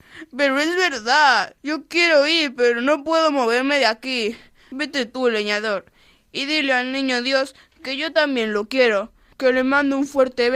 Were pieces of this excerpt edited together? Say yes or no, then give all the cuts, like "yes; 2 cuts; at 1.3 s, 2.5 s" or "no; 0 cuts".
yes; 1 cut; at 1.6 s